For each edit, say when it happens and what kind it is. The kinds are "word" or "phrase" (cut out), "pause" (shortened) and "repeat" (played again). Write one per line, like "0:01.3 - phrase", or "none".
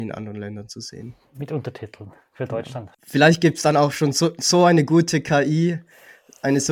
0:02.9 - pause